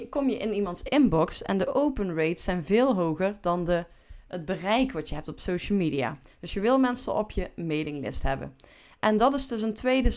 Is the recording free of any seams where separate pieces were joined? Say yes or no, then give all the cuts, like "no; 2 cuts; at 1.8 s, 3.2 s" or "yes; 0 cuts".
yes; 0 cuts